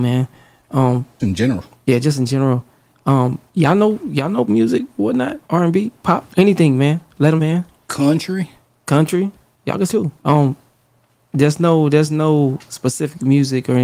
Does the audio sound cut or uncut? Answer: cut